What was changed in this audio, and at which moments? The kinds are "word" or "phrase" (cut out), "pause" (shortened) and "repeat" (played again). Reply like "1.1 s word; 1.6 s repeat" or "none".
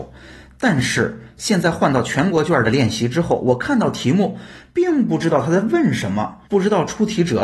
6.5 s pause